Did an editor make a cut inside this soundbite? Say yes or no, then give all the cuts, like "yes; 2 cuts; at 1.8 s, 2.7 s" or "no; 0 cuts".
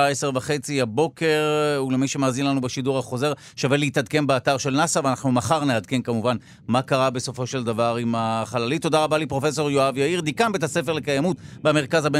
no; 0 cuts